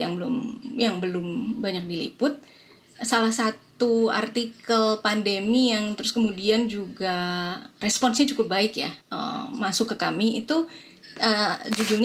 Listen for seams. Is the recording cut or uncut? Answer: cut